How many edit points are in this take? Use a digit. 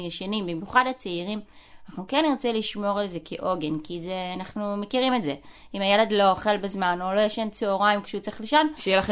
0